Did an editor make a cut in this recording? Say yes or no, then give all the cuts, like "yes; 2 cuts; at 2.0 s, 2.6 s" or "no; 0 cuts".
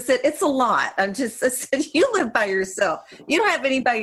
no; 0 cuts